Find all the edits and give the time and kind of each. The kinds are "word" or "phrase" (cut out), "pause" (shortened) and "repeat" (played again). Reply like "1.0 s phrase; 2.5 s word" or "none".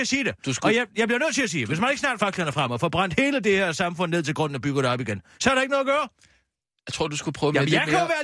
2.2 s phrase